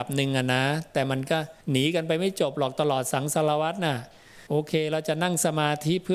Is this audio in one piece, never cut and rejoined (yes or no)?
no